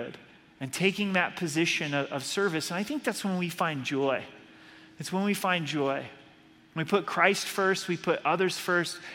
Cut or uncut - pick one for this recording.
uncut